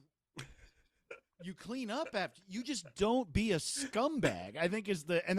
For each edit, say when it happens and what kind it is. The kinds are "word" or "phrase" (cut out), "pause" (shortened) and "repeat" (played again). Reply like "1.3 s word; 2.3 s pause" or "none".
none